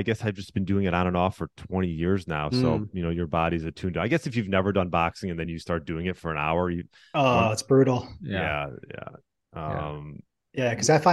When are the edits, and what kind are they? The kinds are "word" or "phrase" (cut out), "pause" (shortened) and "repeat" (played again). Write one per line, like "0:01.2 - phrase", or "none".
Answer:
none